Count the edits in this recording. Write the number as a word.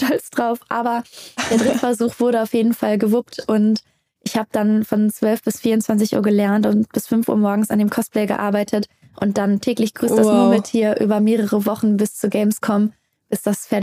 zero